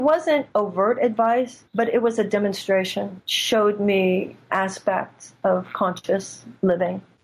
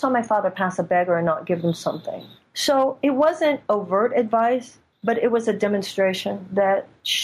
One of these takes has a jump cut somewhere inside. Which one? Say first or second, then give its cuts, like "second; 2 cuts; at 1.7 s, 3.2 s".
first; 3 cuts; at 1.7 s, 3.2 s, 4.5 s